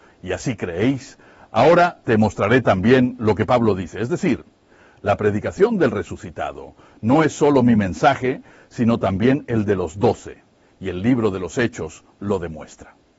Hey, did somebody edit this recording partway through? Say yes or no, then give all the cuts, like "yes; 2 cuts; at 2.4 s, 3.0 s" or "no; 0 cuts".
no; 0 cuts